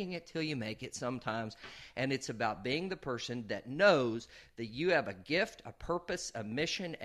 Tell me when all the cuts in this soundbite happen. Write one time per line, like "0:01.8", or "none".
none

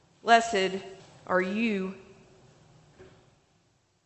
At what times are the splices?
0:01.0

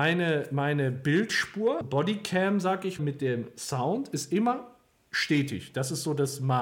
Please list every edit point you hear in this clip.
0:01.8
0:03.0

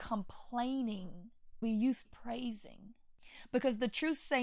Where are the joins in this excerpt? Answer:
0:01.6
0:02.1

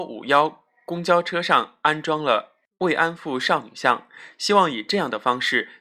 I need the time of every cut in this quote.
none

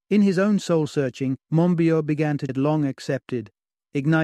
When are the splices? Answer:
0:01.4
0:02.5

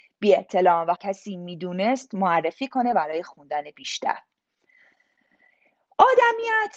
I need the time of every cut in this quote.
0:01.0

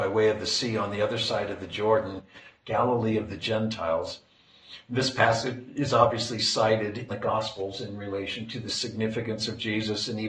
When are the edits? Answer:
0:07.1

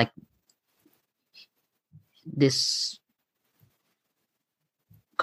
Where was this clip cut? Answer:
none

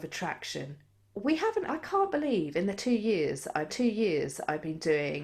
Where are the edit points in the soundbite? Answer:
0:01.7
0:03.7

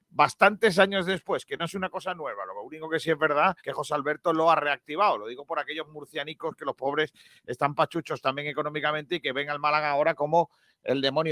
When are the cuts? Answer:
0:03.6

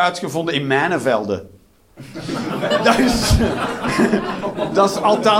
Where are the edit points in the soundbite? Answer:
none

